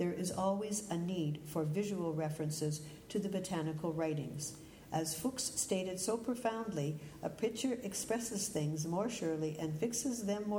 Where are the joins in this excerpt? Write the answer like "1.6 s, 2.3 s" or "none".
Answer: none

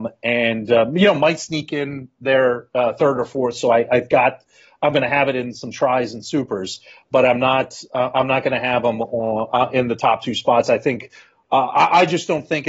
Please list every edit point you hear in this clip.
none

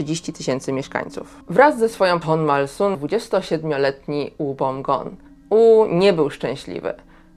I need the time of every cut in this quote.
1.4 s, 2.2 s, 2.9 s, 5.3 s

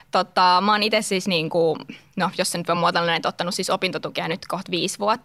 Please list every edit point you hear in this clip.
none

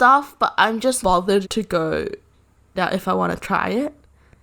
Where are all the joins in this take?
1.0 s, 1.4 s, 2.7 s

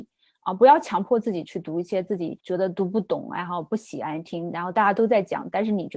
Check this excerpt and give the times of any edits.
2.4 s

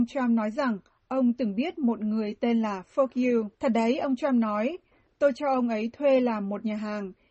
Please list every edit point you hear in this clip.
3.5 s

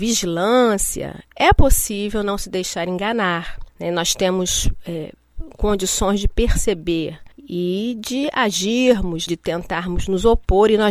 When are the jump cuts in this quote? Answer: 1.3 s, 3.7 s, 7.3 s, 9.3 s

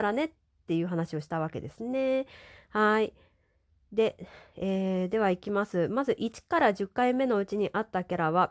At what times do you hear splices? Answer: none

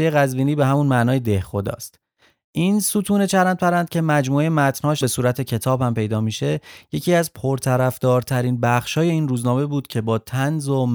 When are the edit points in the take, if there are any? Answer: 5.0 s

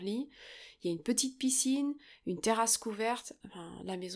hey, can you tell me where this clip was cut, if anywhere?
none

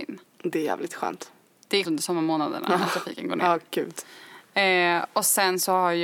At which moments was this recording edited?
1.8 s

